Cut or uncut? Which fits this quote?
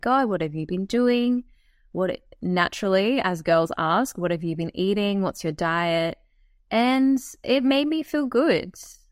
uncut